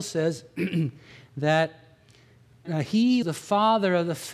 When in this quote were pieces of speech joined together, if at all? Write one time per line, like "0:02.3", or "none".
0:02.6
0:03.2